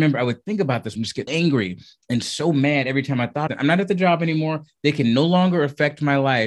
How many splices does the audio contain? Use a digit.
3